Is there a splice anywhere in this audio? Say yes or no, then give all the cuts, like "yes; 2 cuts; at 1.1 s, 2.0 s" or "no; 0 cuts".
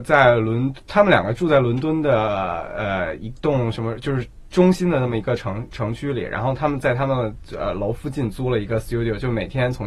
no; 0 cuts